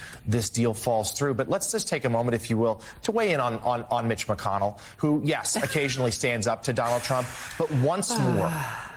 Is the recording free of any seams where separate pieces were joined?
yes; 0 cuts

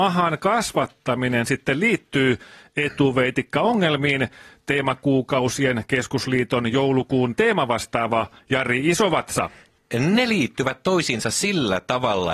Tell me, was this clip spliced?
no; 0 cuts

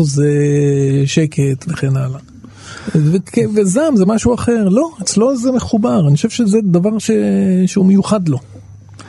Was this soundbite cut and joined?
no; 0 cuts

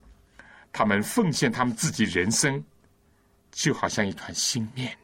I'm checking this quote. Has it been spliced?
no; 0 cuts

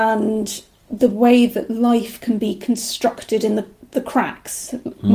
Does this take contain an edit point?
no; 0 cuts

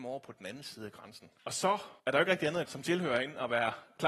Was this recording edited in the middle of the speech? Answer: yes; 3 cuts; at 1.4 s, 2.0 s, 2.7 s

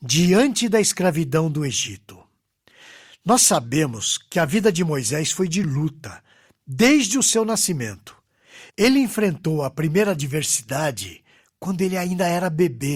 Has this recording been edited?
no; 0 cuts

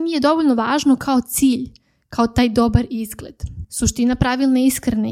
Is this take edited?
no; 0 cuts

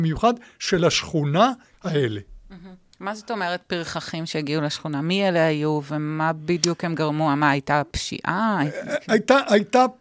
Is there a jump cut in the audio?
yes; 2 cuts; at 1.7 s, 2.9 s

